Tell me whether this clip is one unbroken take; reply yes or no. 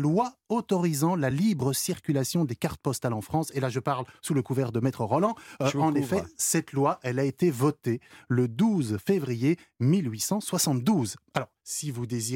yes